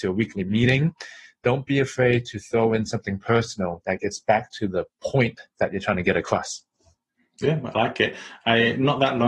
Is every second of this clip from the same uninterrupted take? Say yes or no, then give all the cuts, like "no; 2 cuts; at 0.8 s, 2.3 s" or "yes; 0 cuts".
yes; 0 cuts